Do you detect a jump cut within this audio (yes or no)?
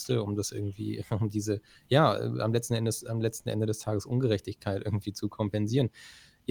no